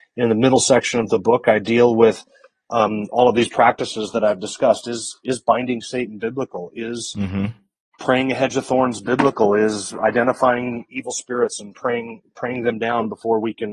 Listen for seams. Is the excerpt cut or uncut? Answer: uncut